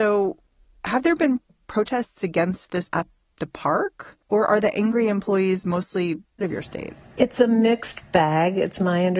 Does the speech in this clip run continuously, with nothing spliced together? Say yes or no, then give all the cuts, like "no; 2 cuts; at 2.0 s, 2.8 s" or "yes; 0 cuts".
no; 4 cuts; at 2.9 s, 4.2 s, 6.4 s, 7.0 s